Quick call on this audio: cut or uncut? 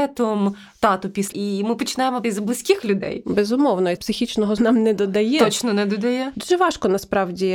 cut